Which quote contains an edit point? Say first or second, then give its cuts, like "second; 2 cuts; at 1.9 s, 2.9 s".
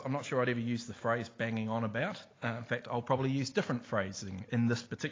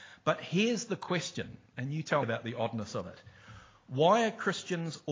second; 2 cuts; at 1.7 s, 2.2 s